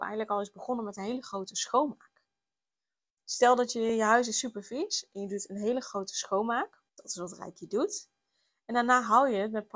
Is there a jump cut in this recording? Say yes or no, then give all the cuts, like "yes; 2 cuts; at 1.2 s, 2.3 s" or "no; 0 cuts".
yes; 1 cut; at 6.9 s